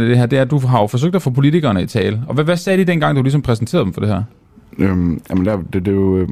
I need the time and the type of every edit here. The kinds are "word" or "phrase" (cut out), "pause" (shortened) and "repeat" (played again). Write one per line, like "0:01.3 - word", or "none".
none